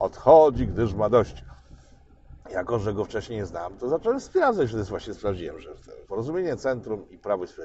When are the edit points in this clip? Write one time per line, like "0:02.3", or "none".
0:02.4
0:06.0

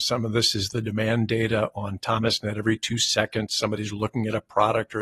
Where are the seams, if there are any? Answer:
none

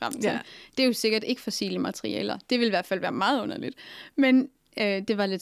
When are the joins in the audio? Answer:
none

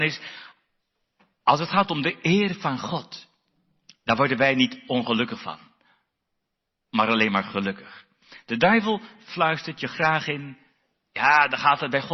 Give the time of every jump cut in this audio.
none

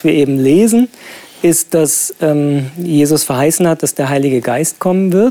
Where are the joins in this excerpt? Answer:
none

